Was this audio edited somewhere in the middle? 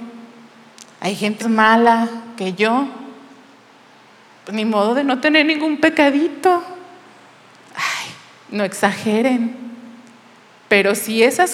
yes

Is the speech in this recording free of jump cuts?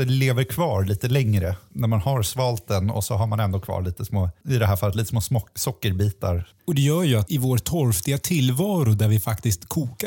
no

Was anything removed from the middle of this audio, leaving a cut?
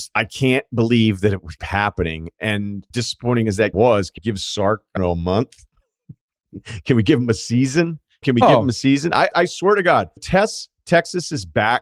yes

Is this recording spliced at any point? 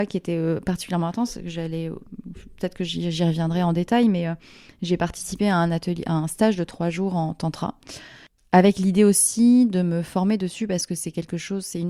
no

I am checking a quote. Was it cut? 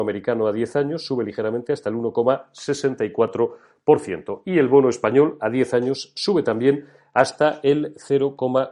no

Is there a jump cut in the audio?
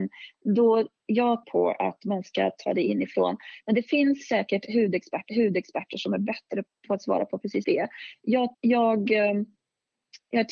yes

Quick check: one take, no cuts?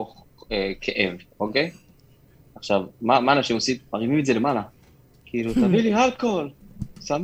yes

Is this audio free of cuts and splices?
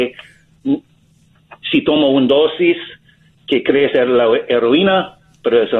yes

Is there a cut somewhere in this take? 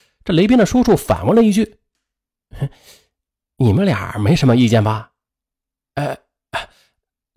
yes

